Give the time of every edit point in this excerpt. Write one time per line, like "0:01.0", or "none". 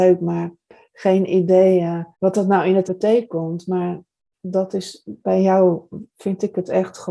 0:02.1
0:02.9